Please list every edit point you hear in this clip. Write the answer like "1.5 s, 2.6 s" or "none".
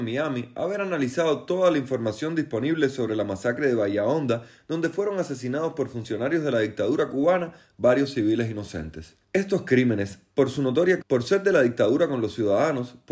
9.2 s, 11.0 s